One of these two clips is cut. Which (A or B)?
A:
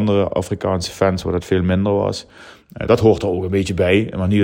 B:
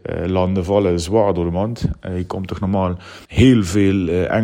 B